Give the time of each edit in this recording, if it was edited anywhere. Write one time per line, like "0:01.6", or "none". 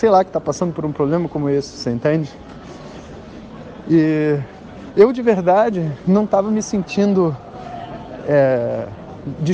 none